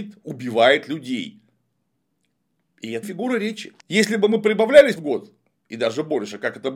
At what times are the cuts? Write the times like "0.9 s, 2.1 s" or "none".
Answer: 3.0 s, 3.8 s, 5.0 s